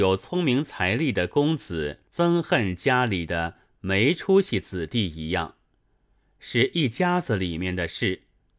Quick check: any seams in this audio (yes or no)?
yes